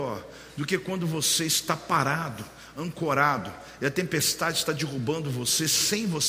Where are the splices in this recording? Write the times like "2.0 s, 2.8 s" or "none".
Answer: none